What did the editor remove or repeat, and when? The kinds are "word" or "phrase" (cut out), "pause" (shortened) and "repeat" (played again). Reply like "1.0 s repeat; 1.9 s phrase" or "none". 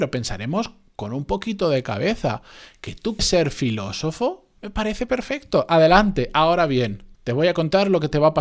3.2 s word; 4.6 s pause; 7.1 s pause